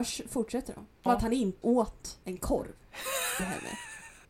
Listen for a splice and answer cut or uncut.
cut